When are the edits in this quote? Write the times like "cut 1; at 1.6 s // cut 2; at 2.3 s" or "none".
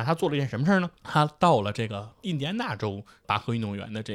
cut 1; at 1.0 s